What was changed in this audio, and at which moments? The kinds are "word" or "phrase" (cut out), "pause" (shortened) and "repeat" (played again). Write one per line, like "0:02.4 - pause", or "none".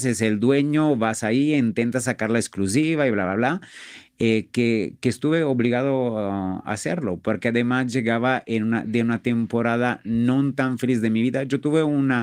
none